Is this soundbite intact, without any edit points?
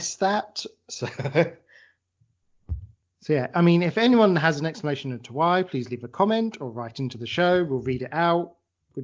yes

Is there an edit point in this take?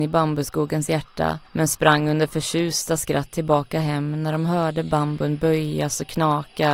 yes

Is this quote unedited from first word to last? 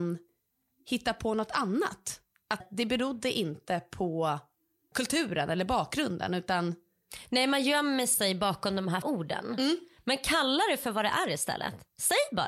no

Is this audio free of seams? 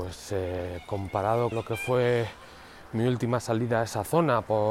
no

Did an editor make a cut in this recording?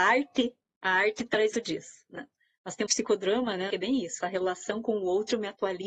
yes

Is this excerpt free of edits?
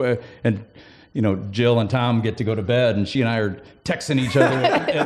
yes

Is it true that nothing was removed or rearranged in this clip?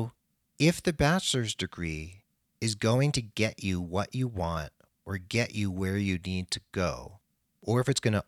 yes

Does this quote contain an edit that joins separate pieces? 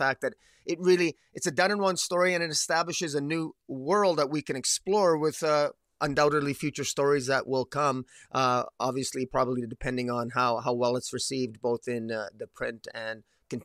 no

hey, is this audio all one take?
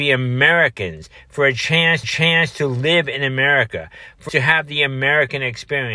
no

